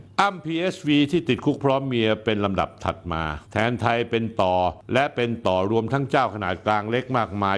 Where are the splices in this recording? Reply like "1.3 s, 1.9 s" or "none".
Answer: 3.4 s